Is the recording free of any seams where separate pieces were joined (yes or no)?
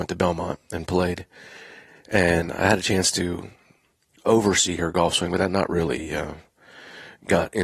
yes